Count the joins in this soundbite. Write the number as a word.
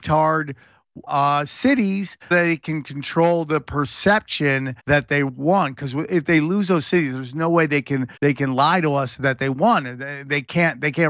four